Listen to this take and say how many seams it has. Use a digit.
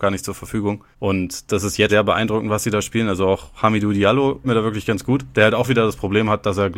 3